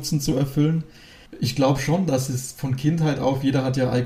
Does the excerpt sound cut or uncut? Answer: uncut